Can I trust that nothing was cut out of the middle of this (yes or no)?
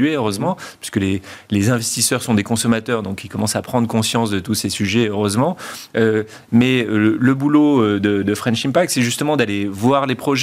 yes